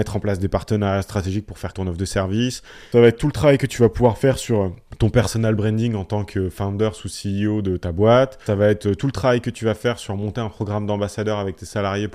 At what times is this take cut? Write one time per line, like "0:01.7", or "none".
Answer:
0:01.7